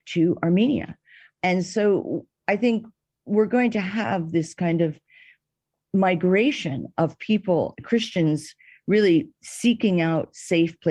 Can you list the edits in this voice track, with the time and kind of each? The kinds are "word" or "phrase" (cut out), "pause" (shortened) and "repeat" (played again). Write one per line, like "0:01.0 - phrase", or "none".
none